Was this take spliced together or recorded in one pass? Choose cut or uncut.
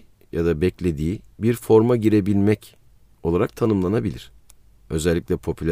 cut